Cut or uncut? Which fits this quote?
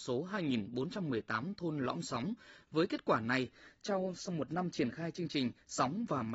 uncut